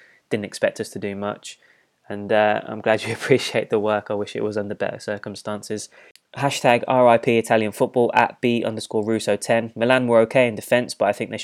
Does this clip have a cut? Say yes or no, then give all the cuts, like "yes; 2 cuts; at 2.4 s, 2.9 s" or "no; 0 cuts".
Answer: no; 0 cuts